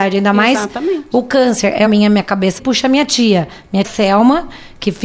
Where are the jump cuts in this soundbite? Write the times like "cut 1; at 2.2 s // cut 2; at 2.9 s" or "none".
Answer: cut 1; at 1.9 s // cut 2; at 2.6 s // cut 3; at 3.8 s